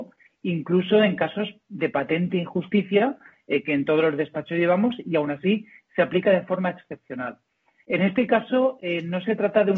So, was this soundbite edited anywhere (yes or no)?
no